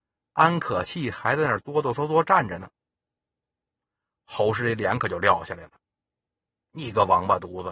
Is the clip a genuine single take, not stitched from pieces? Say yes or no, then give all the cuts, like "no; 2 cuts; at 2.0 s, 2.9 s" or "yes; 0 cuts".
yes; 0 cuts